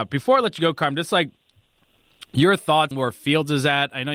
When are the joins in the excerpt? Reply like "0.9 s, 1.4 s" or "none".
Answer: 2.9 s